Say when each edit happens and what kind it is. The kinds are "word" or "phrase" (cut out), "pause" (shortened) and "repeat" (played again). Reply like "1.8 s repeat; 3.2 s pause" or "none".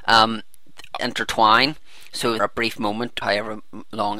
1.0 s phrase; 2.4 s phrase; 3.2 s word